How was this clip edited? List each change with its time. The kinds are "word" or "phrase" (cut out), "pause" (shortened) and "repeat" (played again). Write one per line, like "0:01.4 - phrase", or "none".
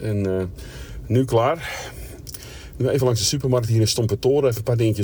none